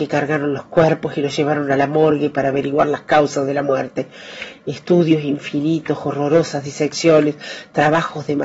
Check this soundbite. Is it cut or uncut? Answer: uncut